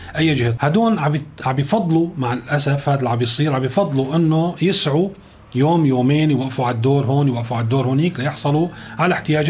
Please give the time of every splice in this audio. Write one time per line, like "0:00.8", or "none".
none